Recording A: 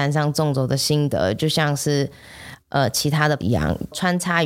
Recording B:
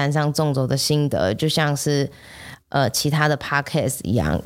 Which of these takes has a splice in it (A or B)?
A